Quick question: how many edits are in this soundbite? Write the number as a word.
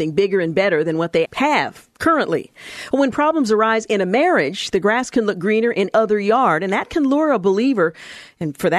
two